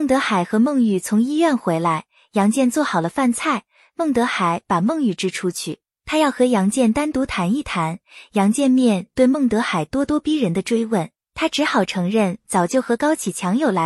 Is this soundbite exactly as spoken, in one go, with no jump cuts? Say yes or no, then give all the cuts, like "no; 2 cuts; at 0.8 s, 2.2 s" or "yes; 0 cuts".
yes; 0 cuts